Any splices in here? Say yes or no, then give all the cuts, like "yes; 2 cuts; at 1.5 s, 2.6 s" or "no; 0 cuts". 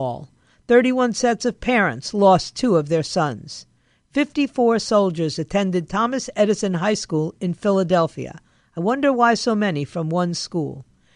no; 0 cuts